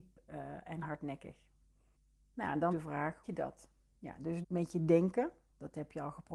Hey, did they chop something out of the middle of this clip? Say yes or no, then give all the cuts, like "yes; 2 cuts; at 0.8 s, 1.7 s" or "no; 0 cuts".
yes; 4 cuts; at 1.9 s, 2.7 s, 3.2 s, 4.4 s